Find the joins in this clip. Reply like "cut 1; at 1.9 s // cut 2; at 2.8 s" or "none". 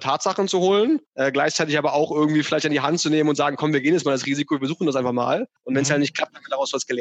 cut 1; at 1.1 s // cut 2; at 5.6 s